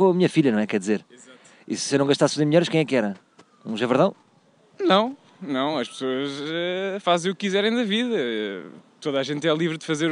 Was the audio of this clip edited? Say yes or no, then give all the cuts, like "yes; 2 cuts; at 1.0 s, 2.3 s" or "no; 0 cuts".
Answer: no; 0 cuts